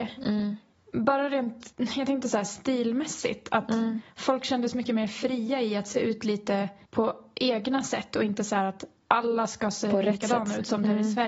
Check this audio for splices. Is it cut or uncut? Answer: uncut